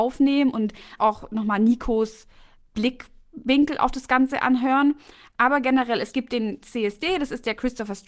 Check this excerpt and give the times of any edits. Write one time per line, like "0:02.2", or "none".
0:01.0